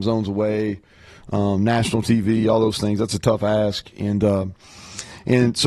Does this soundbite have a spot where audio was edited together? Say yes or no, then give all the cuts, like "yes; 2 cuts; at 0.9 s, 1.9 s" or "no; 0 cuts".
no; 0 cuts